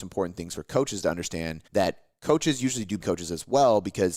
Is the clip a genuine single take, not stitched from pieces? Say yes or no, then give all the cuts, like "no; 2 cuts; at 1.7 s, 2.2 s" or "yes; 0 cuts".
no; 2 cuts; at 1.7 s, 3.0 s